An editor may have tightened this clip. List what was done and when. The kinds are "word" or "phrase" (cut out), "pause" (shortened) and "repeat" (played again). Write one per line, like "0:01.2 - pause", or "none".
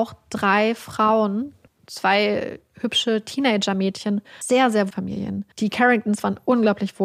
0:01.7 - pause
0:04.4 - word
0:04.9 - word
0:05.5 - pause